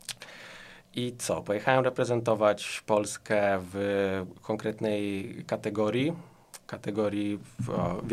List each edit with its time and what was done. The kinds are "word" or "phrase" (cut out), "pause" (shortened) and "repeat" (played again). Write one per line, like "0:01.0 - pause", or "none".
none